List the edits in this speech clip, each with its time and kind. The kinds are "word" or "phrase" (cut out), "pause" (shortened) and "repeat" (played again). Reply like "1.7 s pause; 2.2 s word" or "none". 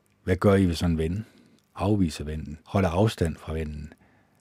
1.6 s pause; 2.6 s pause